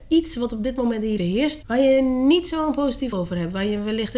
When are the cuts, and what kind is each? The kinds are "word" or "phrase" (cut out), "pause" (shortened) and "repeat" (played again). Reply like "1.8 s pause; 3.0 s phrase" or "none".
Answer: 1.2 s word; 1.6 s word; 3.1 s word